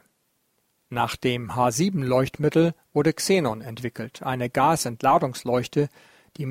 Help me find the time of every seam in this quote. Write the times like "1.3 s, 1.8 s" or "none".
none